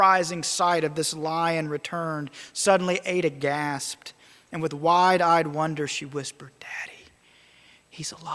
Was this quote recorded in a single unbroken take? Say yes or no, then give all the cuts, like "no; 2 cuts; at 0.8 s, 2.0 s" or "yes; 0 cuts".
yes; 0 cuts